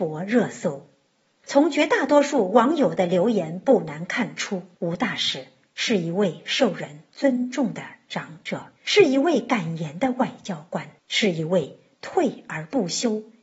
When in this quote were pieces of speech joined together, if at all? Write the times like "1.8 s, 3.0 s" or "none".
4.7 s, 8.8 s, 11.0 s